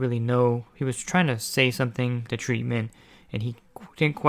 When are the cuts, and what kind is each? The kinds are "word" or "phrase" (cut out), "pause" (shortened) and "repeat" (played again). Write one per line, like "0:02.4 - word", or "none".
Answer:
0:02.3 - word